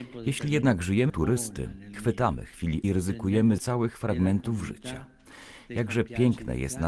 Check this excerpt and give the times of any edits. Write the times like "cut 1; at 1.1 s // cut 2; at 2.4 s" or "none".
cut 1; at 1.1 s // cut 2; at 1.9 s // cut 3; at 2.8 s // cut 4; at 3.6 s